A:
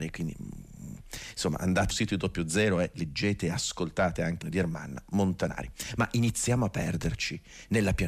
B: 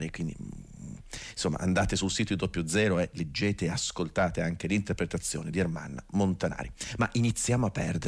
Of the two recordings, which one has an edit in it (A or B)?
A